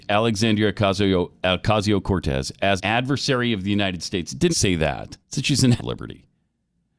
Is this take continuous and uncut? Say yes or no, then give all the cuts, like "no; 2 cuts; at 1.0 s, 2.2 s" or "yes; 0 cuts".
no; 4 cuts; at 2.8 s, 4.5 s, 5.2 s, 5.8 s